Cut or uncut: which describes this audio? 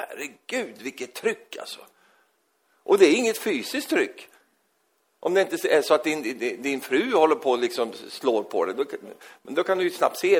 uncut